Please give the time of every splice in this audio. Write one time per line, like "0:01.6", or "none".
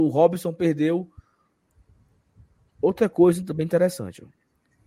none

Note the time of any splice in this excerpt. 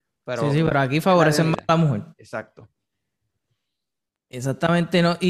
0:02.1

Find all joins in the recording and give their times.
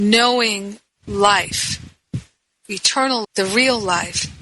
0:01.0
0:03.2

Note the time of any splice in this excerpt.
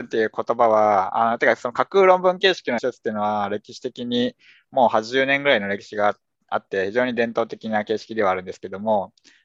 0:02.8

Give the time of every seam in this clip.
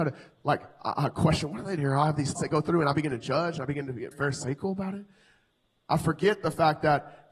0:01.8
0:02.4
0:04.1

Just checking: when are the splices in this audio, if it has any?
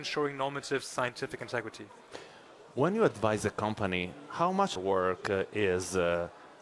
0:04.8

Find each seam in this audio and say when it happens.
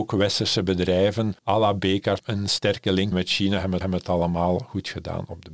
0:01.4
0:02.2
0:03.1
0:03.8

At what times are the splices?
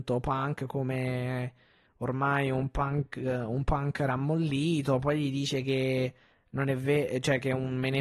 none

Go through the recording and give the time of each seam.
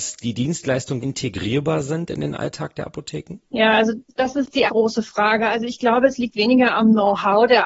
0:01.0
0:03.4
0:04.7

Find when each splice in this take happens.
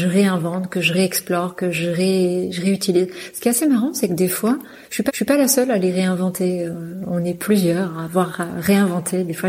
0:05.1

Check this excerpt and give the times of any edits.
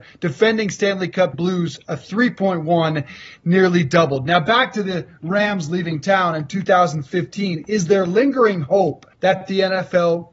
0:01.3
0:09.1

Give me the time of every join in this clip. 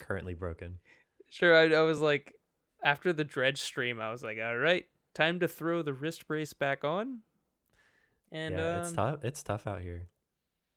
none

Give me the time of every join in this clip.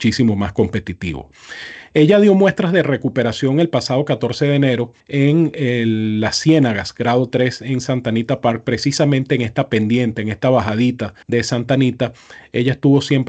0:05.0
0:11.2

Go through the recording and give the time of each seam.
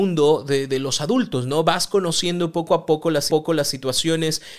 0:03.3

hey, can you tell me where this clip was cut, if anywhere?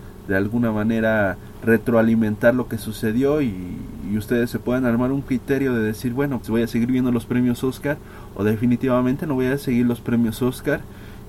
0:06.4

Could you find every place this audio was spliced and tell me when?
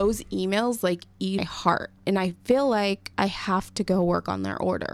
0:01.4
0:03.1

